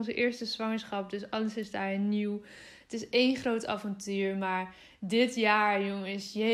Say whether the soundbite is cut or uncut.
uncut